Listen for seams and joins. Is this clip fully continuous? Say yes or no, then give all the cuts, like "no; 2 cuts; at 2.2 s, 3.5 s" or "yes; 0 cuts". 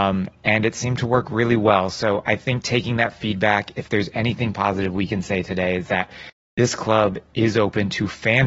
yes; 0 cuts